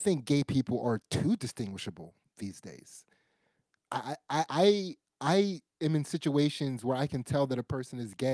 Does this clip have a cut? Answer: no; 0 cuts

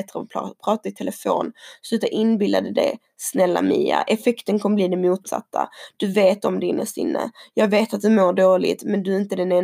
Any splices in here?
no; 0 cuts

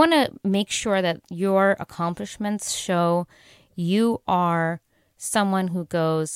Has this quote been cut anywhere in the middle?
no; 0 cuts

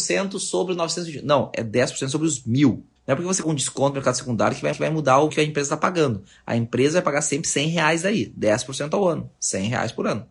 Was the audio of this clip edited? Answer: yes; 4 cuts; at 3.0 s, 3.4 s, 4.7 s, 5.3 s

